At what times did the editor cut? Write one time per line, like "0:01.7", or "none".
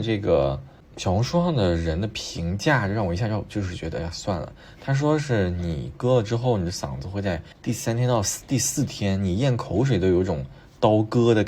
0:07.5